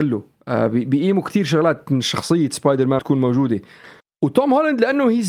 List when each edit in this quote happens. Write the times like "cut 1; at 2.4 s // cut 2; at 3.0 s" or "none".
cut 1; at 3.0 s // cut 2; at 4.0 s